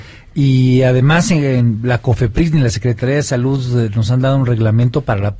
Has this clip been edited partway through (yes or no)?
no